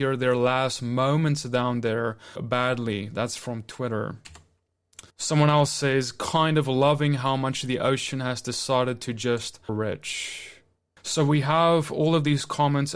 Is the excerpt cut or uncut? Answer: cut